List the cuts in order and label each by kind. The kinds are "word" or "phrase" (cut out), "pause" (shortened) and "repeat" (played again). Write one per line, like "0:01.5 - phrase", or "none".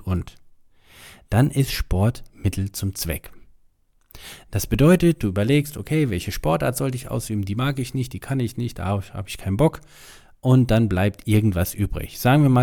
none

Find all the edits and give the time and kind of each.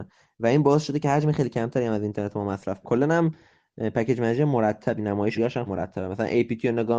0:02.8 - word
0:05.0 - word
0:05.3 - word
0:05.7 - word

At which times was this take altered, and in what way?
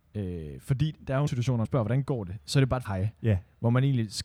0:01.3 - word
0:01.6 - word
0:02.8 - word

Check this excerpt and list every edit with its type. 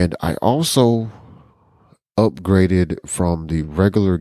none

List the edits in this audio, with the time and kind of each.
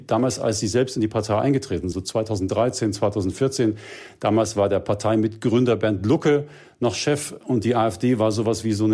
0:01.9 - word

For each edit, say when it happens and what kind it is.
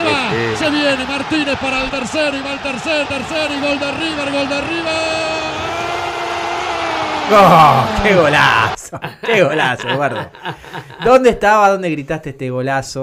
0:01.9 - phrase
0:03.0 - phrase

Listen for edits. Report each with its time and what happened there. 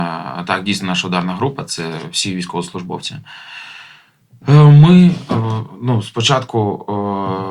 none

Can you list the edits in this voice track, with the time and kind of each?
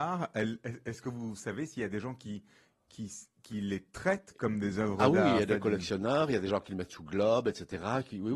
none

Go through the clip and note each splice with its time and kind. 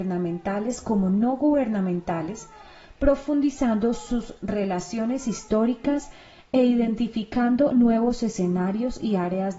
none

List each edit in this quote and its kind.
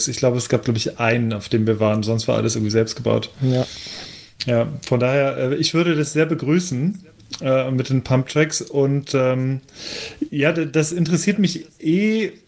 none

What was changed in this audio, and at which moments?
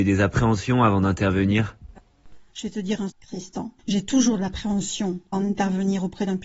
0:02.5 - pause
0:03.1 - word
0:03.8 - pause
0:05.3 - word

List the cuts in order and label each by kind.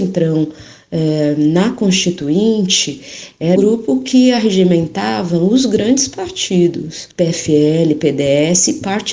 0:03.6 - word
0:07.1 - pause

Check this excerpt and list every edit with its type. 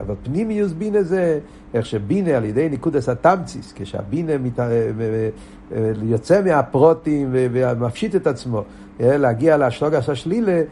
none

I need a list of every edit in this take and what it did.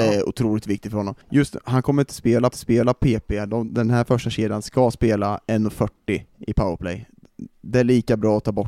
0:01.2 - pause
0:02.5 - repeat
0:03.7 - word
0:06.3 - pause

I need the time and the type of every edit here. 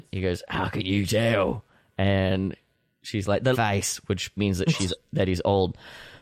0:03.5 - phrase
0:04.4 - word

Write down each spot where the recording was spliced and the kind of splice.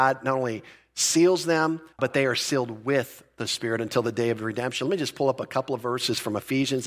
0:01.9 - pause

